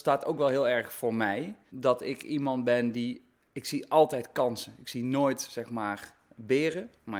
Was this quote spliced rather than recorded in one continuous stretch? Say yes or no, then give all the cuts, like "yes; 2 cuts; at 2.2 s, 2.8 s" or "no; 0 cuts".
no; 0 cuts